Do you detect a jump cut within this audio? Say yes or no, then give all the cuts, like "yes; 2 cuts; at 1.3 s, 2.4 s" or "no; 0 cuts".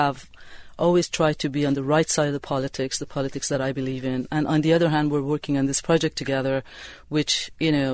no; 0 cuts